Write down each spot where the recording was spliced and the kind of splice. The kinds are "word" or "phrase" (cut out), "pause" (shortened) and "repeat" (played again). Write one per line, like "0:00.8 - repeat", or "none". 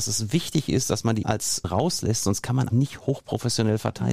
0:01.2 - word
0:01.6 - phrase
0:02.7 - word